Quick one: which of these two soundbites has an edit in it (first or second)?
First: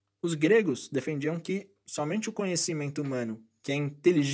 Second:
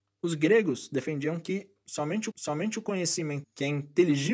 second